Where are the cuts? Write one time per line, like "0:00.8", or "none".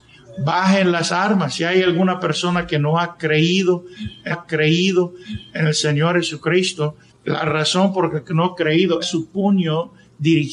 0:04.3
0:07.1
0:09.0